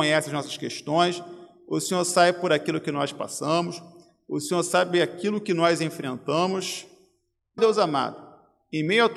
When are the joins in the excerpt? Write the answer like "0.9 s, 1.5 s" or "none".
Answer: 7.6 s